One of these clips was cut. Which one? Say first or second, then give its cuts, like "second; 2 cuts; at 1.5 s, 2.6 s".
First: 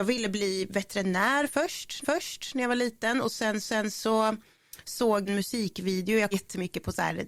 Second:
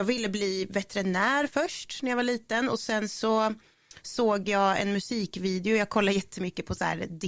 first; 4 cuts; at 2.0 s, 3.6 s, 5.3 s, 6.3 s